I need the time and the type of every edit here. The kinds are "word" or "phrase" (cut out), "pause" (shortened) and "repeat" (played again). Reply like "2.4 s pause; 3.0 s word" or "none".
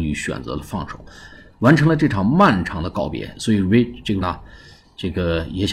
4.2 s word